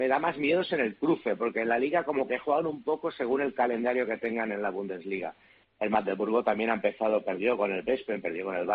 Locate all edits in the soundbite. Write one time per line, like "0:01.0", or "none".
none